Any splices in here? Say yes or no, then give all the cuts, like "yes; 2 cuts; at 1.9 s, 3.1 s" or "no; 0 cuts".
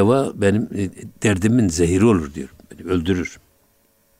no; 0 cuts